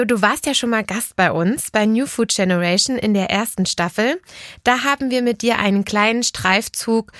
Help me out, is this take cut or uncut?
uncut